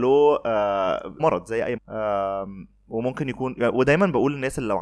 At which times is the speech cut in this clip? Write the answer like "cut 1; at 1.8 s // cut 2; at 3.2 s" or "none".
cut 1; at 1.2 s // cut 2; at 1.8 s